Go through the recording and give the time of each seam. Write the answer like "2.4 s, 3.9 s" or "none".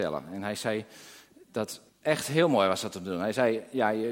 1.9 s